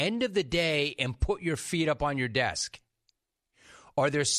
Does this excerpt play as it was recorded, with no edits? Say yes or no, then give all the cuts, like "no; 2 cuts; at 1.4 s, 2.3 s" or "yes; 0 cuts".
yes; 0 cuts